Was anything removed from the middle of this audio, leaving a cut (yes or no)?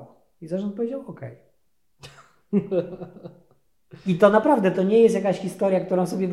no